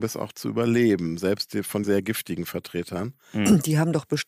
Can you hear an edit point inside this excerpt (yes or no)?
yes